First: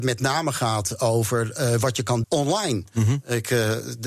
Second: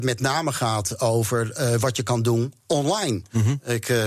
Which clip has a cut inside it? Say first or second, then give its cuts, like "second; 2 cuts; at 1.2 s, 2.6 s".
first; 1 cut; at 2.2 s